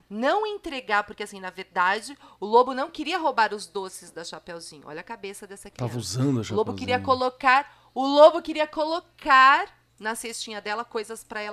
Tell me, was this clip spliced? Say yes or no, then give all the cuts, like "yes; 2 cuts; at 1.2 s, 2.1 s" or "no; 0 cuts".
yes; 1 cut; at 9.9 s